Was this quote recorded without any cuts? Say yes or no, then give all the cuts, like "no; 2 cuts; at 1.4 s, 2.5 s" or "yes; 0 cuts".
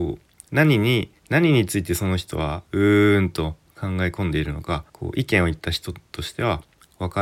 no; 2 cuts; at 1.2 s, 4.9 s